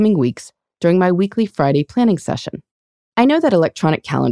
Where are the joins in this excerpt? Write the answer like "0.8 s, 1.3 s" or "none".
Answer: none